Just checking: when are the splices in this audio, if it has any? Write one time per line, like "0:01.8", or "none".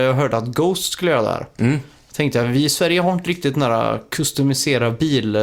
none